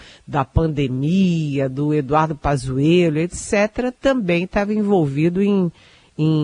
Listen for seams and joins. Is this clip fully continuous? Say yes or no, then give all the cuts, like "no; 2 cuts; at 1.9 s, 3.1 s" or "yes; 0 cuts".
yes; 0 cuts